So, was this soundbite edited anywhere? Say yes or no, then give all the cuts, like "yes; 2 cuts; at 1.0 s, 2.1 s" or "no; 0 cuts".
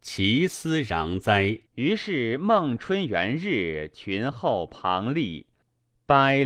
yes; 1 cut; at 1.7 s